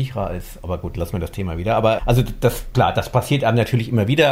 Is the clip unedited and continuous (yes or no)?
no